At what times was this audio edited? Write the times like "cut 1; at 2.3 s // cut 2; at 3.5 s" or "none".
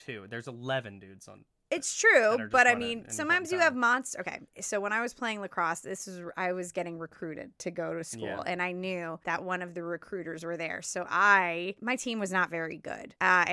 none